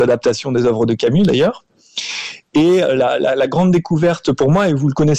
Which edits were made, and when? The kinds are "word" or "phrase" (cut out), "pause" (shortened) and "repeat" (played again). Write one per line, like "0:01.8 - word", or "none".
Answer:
none